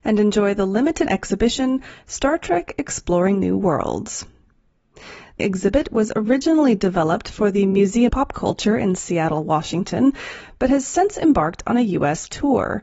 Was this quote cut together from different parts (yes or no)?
yes